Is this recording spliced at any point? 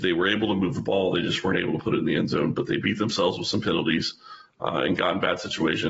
no; 0 cuts

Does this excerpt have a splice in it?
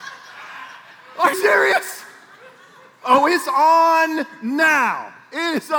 yes; 1 cut; at 1.3 s

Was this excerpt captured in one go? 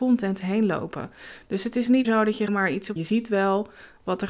no; 3 cuts; at 2.0 s, 2.5 s, 3.0 s

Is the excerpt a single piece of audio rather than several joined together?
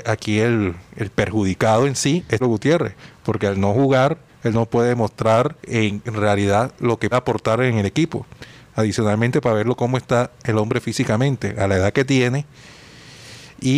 no; 4 cuts; at 2.4 s, 4.3 s, 5.6 s, 7.1 s

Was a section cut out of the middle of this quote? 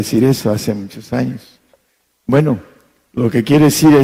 no; 0 cuts

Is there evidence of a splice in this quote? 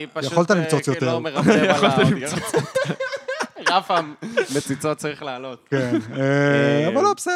no; 0 cuts

